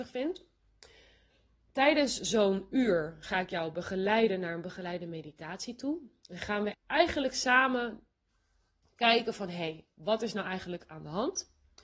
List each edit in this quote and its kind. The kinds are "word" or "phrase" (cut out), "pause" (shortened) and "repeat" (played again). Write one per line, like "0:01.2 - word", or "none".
0:06.7 - word